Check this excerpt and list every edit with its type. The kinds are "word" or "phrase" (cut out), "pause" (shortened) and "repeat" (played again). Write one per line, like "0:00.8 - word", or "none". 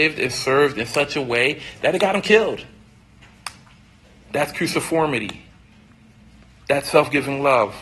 none